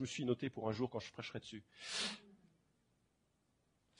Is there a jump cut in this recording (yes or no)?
no